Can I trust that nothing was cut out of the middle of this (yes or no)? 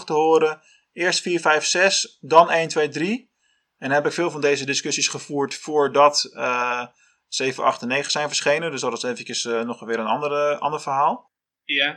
yes